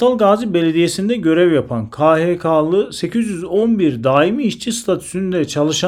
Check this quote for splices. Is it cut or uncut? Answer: uncut